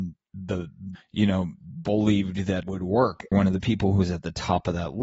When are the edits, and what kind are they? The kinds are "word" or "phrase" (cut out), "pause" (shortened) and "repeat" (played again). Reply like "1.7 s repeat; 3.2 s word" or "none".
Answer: 0.9 s phrase; 2.6 s word; 3.3 s phrase